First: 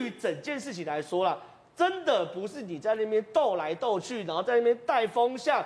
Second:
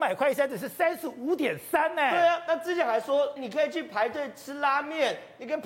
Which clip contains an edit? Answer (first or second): second